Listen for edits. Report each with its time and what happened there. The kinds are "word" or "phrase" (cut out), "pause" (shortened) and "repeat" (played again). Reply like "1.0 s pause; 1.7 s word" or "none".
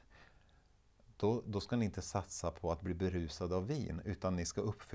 none